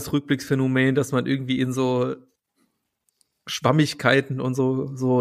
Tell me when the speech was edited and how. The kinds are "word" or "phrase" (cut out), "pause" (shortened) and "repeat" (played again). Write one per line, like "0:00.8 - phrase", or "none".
none